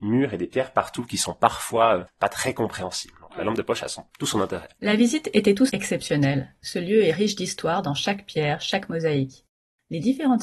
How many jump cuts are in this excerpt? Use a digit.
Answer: 3